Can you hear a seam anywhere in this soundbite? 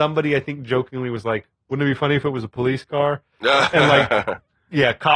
no; 0 cuts

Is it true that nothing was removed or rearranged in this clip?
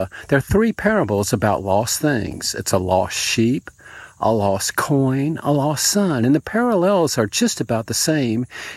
yes; 0 cuts

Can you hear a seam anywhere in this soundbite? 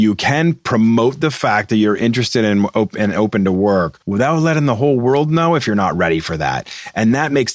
yes; 1 cut; at 4.0 s

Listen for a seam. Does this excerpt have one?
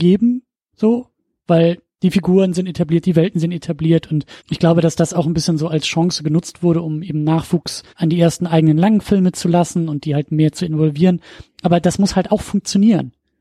yes; 2 cuts; at 4.4 s, 7.9 s

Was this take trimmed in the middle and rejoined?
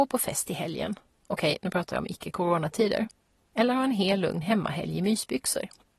no; 0 cuts

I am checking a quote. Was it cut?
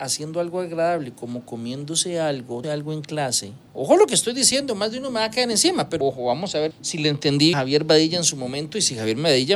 yes; 5 cuts; at 2.6 s, 3.7 s, 6.0 s, 6.7 s, 7.5 s

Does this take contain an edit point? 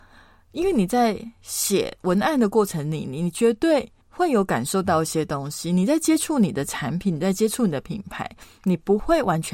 yes; 1 cut; at 4.0 s

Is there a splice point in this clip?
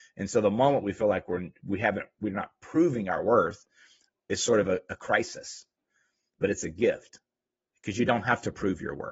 no; 0 cuts

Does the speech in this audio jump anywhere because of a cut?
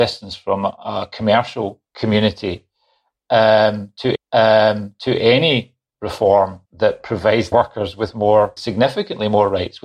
yes; 5 cuts; at 1.9 s, 4.1 s, 6.6 s, 7.5 s, 8.6 s

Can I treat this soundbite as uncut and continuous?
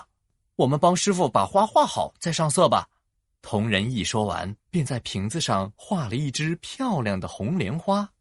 no; 2 cuts; at 3.1 s, 4.6 s

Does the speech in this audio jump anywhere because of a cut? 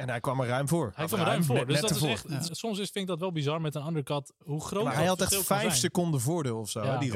yes; 1 cut; at 2.5 s

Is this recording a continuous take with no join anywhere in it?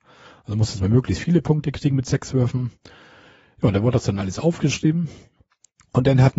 yes; 0 cuts

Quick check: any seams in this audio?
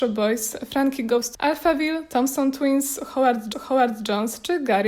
yes; 2 cuts; at 1.3 s, 3.5 s

